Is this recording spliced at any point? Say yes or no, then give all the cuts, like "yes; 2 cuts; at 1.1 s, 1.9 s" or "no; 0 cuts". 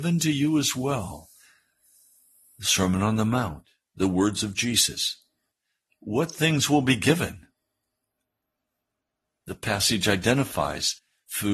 no; 0 cuts